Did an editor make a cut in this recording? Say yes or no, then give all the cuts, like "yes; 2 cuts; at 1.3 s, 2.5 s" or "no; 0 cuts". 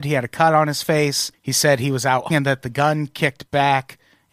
yes; 2 cuts; at 1.3 s, 2.3 s